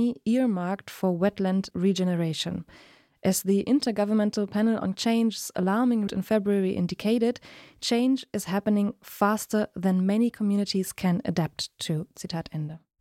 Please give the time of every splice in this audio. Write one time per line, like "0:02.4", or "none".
0:05.0
0:06.1